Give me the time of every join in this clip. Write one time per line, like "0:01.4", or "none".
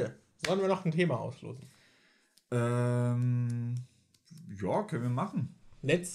none